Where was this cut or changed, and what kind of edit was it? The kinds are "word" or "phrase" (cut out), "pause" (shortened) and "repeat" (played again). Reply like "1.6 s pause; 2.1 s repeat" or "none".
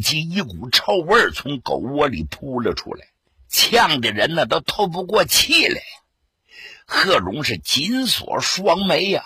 none